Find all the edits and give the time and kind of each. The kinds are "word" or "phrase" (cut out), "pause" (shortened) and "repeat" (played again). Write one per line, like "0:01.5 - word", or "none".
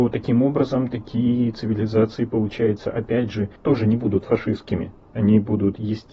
0:03.6 - pause